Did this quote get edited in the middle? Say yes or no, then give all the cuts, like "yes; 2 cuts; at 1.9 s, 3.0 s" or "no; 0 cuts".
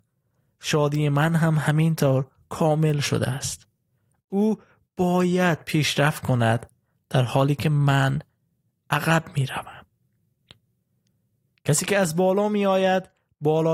no; 0 cuts